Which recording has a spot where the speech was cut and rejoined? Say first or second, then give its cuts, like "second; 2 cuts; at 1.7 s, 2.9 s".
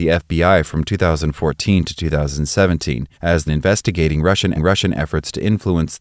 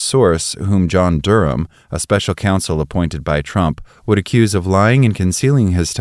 first; 3 cuts; at 3.1 s, 3.5 s, 4.5 s